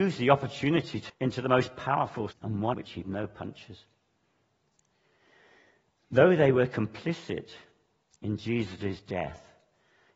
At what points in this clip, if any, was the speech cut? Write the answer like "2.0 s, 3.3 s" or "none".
1.1 s, 2.3 s, 2.7 s, 3.0 s